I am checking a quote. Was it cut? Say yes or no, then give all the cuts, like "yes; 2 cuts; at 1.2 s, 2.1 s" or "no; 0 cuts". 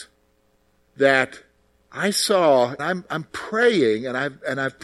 yes; 1 cut; at 2.8 s